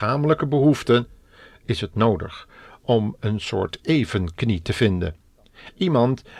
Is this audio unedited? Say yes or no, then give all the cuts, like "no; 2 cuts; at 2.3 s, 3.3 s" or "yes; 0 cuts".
yes; 0 cuts